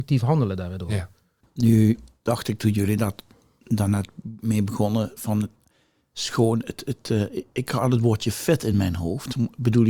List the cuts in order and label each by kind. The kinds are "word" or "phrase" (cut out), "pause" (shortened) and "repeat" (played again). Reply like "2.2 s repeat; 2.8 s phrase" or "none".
none